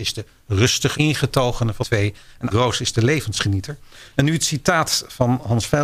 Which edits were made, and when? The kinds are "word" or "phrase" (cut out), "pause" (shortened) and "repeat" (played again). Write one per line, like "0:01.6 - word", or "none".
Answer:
0:00.9 - word
0:01.8 - word
0:02.5 - word

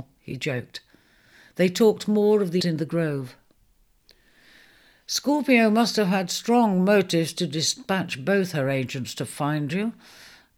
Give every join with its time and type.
0:02.6 - word

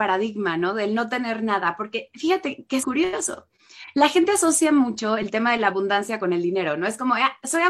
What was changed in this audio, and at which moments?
0:02.8 - word

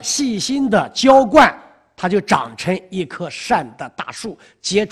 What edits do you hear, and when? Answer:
none

